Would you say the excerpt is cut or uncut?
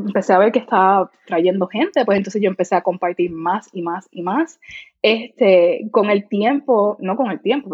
uncut